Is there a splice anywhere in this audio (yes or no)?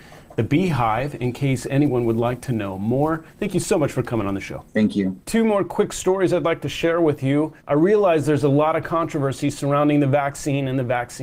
yes